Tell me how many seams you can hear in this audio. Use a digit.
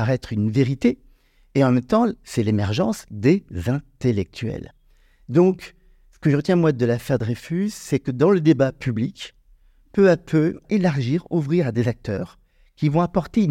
1